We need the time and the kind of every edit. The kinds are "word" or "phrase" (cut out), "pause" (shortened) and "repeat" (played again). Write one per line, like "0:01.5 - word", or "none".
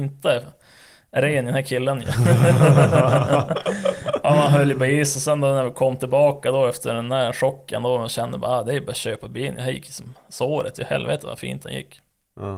none